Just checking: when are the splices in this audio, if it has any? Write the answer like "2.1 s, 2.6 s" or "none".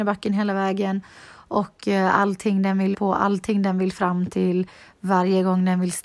2.9 s